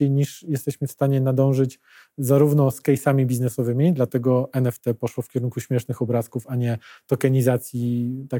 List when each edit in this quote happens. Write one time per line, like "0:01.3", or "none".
none